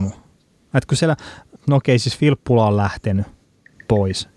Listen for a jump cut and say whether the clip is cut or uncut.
uncut